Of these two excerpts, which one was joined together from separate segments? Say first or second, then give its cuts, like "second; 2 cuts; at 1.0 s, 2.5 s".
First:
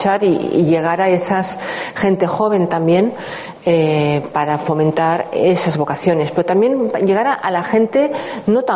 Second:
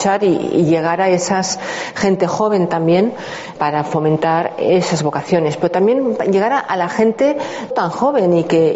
second; 2 cuts; at 3.6 s, 7.7 s